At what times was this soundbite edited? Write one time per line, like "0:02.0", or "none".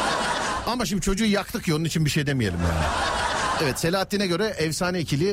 none